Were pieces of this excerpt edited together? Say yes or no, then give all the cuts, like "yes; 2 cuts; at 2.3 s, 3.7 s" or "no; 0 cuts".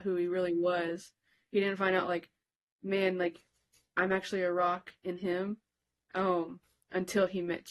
no; 0 cuts